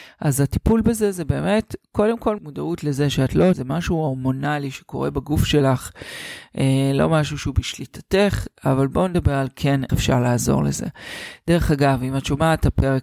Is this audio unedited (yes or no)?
no